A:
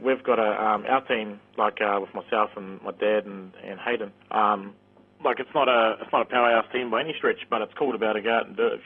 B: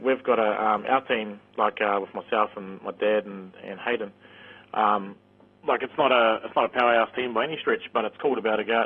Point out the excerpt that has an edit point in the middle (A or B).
A